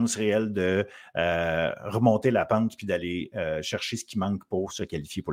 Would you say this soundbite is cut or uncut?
uncut